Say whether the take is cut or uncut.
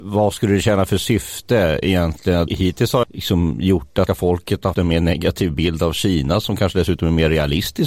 cut